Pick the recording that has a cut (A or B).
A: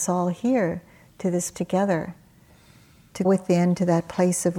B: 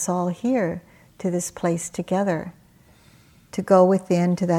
A